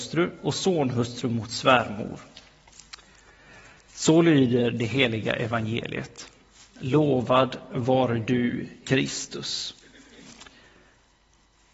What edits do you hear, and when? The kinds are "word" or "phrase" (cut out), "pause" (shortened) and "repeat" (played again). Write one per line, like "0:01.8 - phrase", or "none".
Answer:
none